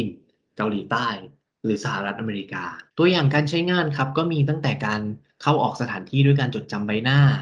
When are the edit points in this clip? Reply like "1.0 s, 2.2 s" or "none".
2.9 s